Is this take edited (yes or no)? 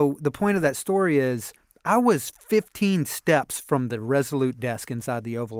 no